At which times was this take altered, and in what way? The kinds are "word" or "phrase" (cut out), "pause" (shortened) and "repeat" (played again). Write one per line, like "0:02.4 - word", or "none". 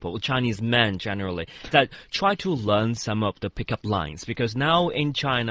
0:01.7 - word